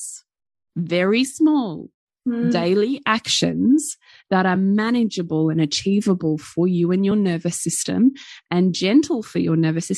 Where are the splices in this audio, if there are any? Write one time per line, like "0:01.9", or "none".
none